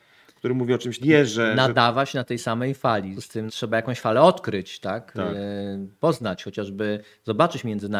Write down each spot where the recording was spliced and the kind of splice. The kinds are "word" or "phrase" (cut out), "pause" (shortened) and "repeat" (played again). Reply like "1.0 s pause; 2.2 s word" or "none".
1.0 s phrase; 3.1 s word; 3.5 s word